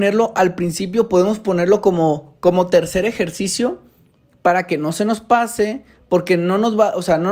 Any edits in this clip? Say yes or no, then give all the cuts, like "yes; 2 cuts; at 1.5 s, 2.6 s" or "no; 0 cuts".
no; 0 cuts